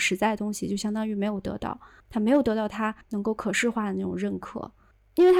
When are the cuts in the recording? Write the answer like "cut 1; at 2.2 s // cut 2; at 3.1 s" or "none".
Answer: cut 1; at 3.0 s